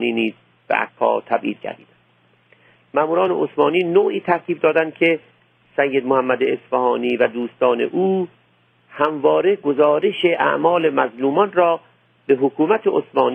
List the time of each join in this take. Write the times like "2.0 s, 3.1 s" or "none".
none